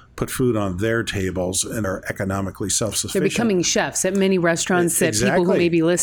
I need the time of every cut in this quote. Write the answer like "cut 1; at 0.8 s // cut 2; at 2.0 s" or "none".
cut 1; at 1.8 s